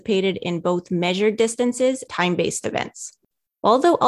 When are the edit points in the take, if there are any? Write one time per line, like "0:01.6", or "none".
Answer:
0:02.1